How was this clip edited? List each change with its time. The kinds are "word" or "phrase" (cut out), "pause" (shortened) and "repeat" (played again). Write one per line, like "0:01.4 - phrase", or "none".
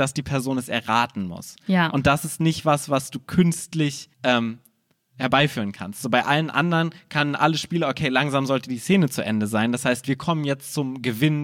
0:04.1 - pause